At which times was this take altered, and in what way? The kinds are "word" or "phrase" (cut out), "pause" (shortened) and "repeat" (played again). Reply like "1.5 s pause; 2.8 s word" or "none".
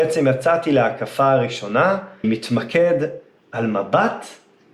2.2 s word